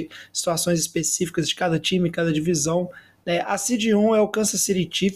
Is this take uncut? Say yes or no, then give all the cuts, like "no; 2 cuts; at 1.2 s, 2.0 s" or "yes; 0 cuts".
yes; 0 cuts